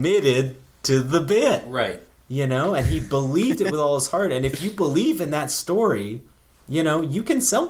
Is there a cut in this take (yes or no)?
no